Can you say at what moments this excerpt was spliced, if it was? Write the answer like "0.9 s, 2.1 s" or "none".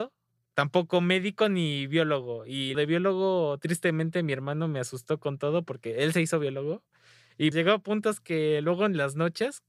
2.7 s, 7.5 s